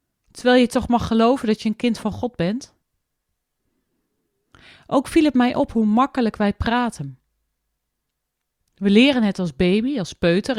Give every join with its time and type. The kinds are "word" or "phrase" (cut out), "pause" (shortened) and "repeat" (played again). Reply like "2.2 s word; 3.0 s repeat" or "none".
none